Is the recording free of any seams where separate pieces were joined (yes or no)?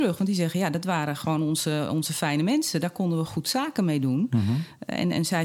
yes